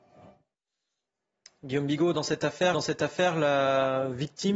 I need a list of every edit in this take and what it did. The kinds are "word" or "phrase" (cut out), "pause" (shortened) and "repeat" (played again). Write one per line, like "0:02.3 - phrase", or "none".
0:02.7 - repeat